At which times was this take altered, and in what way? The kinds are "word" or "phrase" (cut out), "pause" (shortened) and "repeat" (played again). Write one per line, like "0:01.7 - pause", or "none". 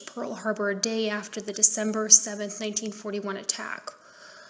none